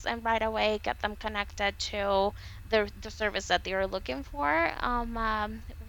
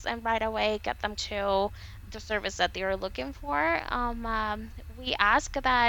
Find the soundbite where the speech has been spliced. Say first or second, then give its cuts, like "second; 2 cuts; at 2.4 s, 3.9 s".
second; 2 cuts; at 1.2 s, 2.1 s